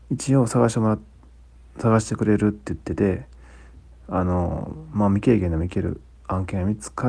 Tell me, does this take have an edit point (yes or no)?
no